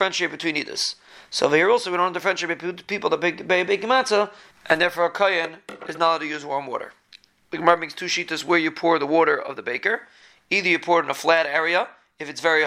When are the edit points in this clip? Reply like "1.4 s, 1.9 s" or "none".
none